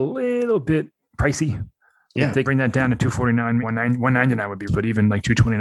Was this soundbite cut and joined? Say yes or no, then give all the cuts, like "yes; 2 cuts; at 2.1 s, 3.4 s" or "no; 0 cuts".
yes; 3 cuts; at 2.4 s, 3.6 s, 4.7 s